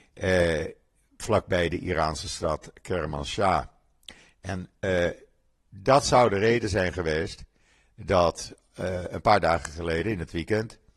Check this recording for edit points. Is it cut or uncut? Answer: uncut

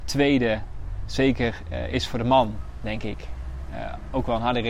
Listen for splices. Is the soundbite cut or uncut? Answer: uncut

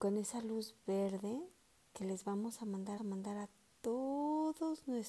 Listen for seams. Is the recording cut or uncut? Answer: cut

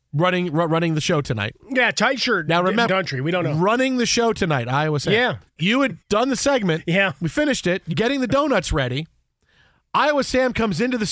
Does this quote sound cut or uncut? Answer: cut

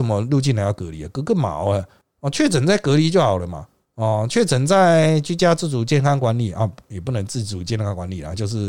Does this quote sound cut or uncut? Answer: uncut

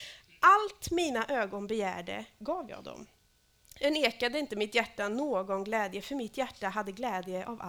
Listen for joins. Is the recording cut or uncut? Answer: uncut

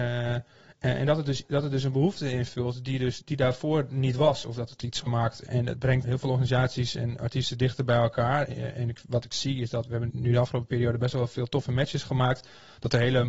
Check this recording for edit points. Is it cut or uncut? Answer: cut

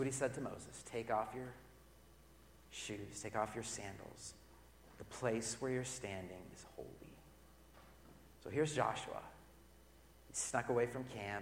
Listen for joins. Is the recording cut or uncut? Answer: uncut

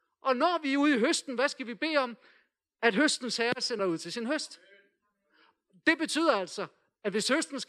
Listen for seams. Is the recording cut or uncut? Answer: cut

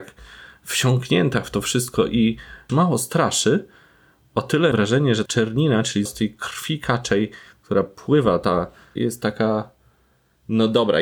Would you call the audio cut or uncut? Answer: cut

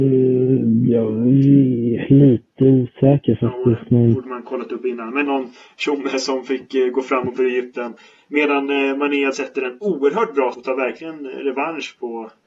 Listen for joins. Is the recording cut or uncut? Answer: cut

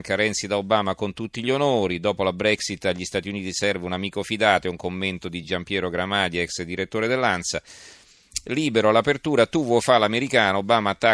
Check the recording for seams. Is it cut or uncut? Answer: uncut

